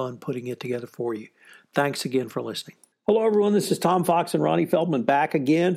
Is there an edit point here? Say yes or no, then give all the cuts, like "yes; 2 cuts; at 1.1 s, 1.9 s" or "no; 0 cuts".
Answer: no; 0 cuts